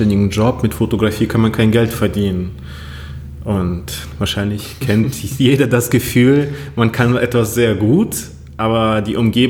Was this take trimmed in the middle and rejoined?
no; 0 cuts

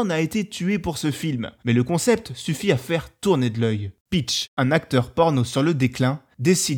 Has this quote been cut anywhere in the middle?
yes; 1 cut; at 1.6 s

